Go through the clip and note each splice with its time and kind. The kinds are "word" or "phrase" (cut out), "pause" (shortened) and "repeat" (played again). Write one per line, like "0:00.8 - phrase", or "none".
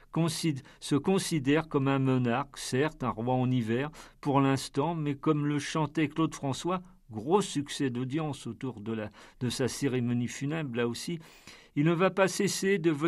none